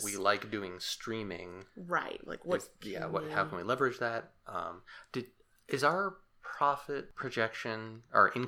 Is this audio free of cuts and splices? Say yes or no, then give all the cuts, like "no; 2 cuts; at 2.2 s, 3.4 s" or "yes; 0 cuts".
yes; 0 cuts